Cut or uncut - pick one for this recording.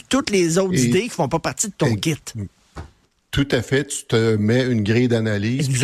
cut